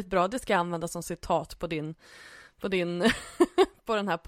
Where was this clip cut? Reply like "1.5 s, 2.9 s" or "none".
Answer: none